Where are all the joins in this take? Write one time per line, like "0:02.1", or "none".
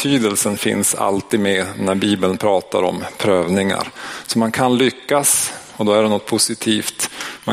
none